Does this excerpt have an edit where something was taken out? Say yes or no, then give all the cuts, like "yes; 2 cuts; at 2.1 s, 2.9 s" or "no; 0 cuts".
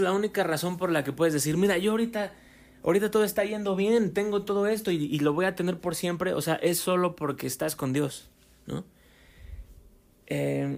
no; 0 cuts